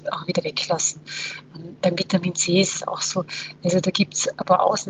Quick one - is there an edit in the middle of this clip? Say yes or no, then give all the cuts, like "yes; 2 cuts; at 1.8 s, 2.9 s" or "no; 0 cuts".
no; 0 cuts